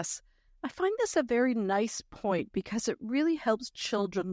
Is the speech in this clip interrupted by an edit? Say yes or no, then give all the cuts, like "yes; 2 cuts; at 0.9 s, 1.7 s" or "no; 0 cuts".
no; 0 cuts